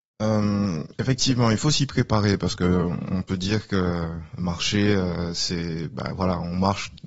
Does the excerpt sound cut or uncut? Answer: cut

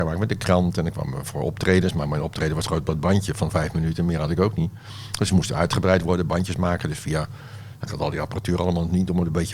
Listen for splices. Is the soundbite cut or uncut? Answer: uncut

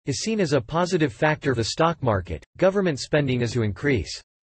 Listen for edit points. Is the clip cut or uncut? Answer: cut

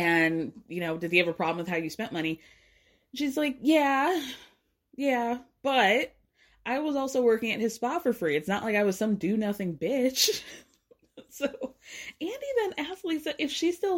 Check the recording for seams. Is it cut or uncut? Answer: uncut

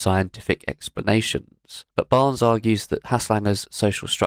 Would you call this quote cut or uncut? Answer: cut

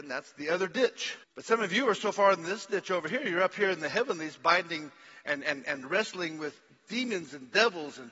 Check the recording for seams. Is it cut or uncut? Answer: cut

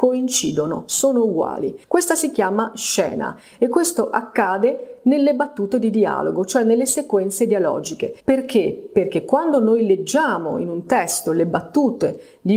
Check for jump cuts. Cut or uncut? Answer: cut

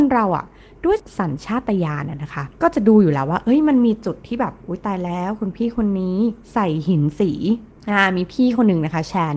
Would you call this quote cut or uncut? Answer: cut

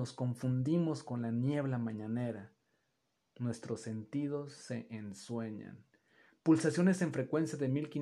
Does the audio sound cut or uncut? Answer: uncut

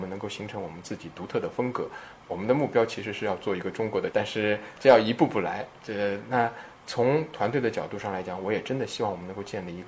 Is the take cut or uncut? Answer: cut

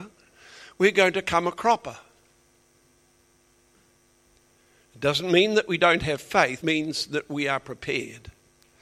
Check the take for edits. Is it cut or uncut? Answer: cut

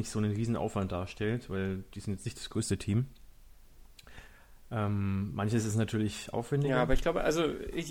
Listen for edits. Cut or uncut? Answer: uncut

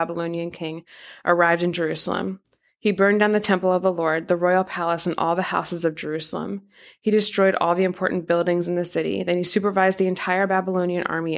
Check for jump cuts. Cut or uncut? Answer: uncut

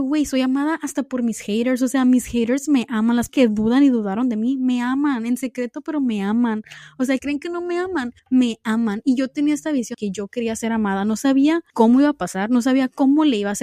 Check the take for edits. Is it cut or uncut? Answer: cut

